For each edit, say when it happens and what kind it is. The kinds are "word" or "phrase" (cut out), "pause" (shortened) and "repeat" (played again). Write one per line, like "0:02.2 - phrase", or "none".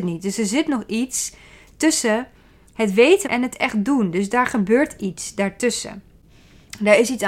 0:03.2 - phrase